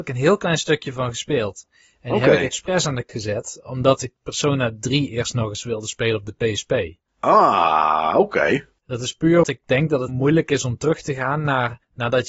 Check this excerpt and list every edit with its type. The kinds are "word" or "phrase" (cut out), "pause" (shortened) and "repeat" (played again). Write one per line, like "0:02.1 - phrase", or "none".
0:03.1 - word
0:04.0 - phrase
0:07.1 - pause
0:08.7 - pause
0:09.4 - word
0:10.1 - word

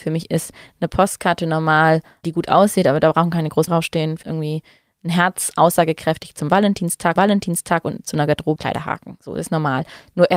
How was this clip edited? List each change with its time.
0:02.2 - word
0:03.7 - word
0:04.2 - phrase
0:07.2 - repeat
0:08.6 - word

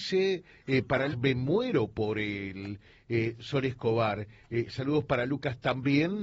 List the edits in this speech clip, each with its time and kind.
0:01.1 - word

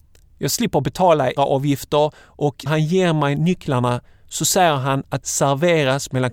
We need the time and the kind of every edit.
0:01.4 - word
0:02.7 - word
0:05.2 - word

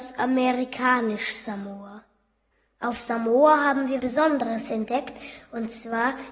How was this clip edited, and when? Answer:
0:04.0 - word

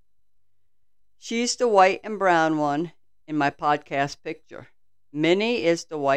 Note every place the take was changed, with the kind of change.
none

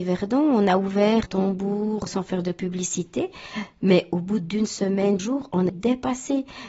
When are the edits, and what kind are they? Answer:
0:01.2 - word
0:02.1 - word
0:05.2 - word
0:05.7 - word

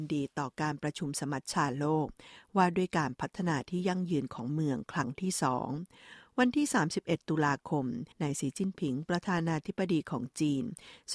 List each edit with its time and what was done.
0:08.1 - pause

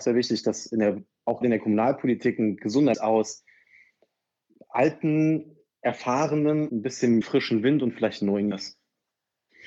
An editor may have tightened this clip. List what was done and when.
0:01.4 - word
0:02.9 - word
0:06.7 - word
0:07.2 - word
0:08.5 - word

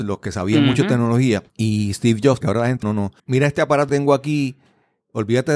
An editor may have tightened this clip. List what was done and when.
0:01.5 - pause
0:02.4 - phrase
0:02.8 - word
0:03.2 - pause
0:03.9 - word

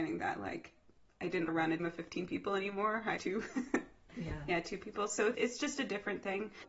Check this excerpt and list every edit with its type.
0:01.5 - word
0:01.8 - word
0:03.2 - word
0:05.3 - word

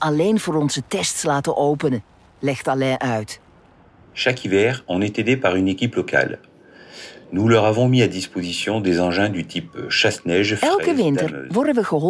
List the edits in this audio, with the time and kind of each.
none

